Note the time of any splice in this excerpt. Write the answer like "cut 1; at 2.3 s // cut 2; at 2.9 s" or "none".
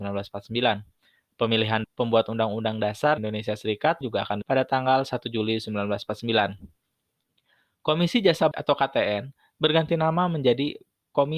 cut 1; at 1.8 s // cut 2; at 3.2 s // cut 3; at 4.0 s // cut 4; at 4.4 s // cut 5; at 8.5 s